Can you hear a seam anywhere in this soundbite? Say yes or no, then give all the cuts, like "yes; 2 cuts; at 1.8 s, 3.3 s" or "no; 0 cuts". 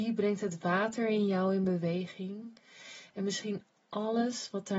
no; 0 cuts